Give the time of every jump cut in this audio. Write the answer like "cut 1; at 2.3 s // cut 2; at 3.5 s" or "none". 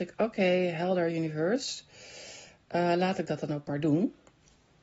none